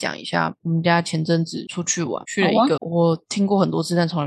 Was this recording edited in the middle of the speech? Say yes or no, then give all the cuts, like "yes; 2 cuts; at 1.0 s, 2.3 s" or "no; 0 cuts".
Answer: yes; 1 cut; at 2.8 s